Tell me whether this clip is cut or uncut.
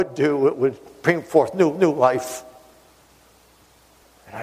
cut